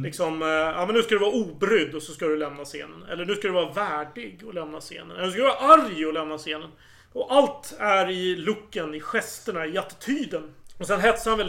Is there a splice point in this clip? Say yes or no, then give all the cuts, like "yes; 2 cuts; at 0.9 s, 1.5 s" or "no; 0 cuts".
no; 0 cuts